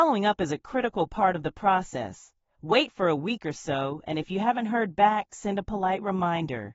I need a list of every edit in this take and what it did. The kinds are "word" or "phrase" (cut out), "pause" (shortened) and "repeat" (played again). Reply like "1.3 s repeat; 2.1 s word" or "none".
none